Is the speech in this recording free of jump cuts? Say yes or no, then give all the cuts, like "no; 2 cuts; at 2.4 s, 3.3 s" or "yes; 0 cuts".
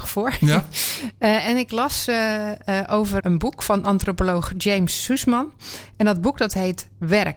no; 1 cut; at 3.2 s